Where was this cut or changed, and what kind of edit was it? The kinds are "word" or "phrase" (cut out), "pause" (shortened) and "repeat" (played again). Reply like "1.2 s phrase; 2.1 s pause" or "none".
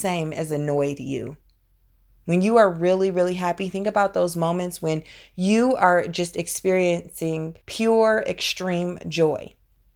7.6 s pause